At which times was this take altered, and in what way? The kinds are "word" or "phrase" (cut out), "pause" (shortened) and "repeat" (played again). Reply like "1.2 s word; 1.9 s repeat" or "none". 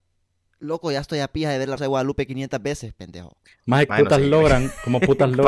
1.8 s word; 3.9 s word

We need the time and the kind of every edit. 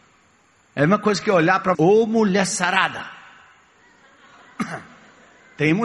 1.7 s phrase

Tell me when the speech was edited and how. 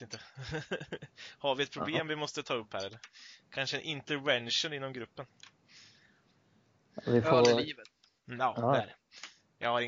none

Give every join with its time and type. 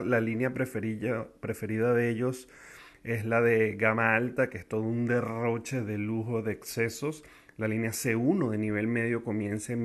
none

